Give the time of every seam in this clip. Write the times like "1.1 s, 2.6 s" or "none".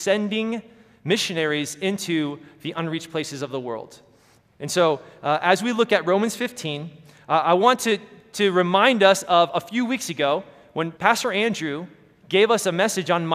11.0 s